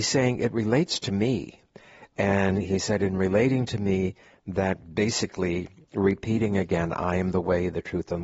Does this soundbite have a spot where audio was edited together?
no; 0 cuts

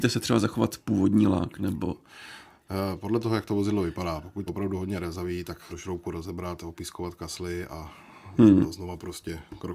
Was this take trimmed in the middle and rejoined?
yes; 2 cuts; at 4.5 s, 5.7 s

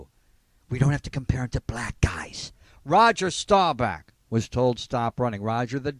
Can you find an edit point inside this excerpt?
no; 0 cuts

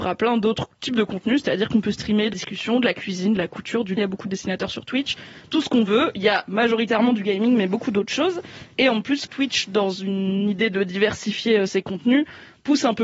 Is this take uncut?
no; 3 cuts; at 2.3 s, 4.0 s, 9.2 s

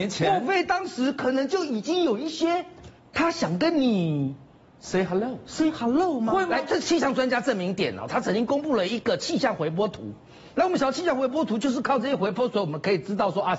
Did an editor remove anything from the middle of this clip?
yes; 1 cut; at 3.0 s

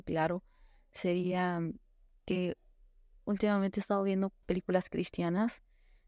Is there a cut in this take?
yes; 1 cut; at 4.4 s

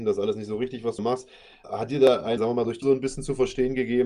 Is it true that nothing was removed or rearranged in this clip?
no; 4 cuts; at 1.0 s, 1.6 s, 2.4 s, 2.8 s

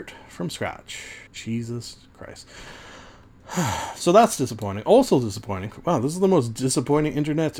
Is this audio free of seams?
no; 1 cut; at 1.3 s

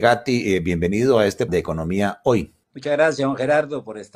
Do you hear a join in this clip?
yes; 2 cuts; at 1.5 s, 2.6 s

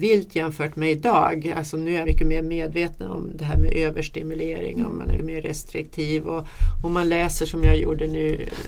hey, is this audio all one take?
no; 2 cuts; at 2.0 s, 5.2 s

